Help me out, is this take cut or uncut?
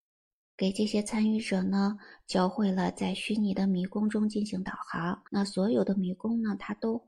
cut